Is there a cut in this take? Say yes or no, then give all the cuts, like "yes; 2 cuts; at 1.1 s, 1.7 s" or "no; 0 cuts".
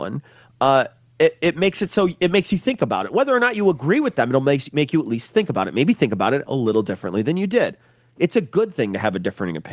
no; 0 cuts